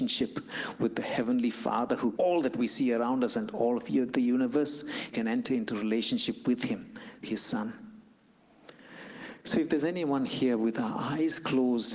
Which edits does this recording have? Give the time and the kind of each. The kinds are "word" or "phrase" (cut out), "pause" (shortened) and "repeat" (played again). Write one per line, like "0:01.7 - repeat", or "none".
0:02.2 - word
0:05.1 - word
0:07.2 - word

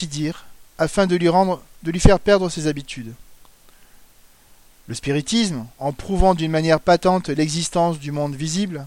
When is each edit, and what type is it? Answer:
0:05.7 - pause

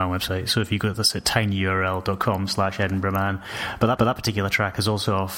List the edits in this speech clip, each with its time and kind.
0:04.0 - repeat

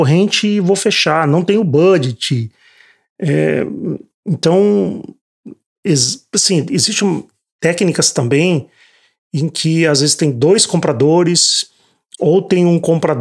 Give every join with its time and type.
none

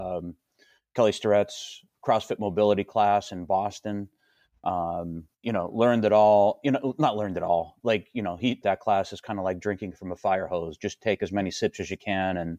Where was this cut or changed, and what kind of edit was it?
0:01.9 - word
0:05.3 - pause
0:08.6 - phrase

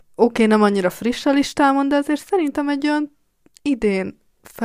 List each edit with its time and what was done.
none

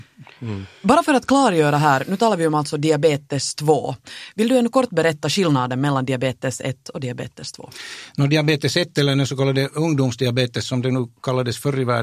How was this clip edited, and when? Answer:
none

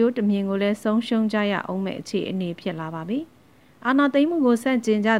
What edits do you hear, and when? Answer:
none

